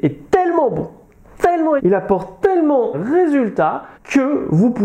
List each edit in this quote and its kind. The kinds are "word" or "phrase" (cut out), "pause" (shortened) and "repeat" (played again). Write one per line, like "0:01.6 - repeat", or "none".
0:01.8 - word
0:02.9 - word
0:03.9 - pause